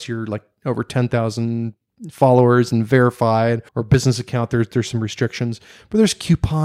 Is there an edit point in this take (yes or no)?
yes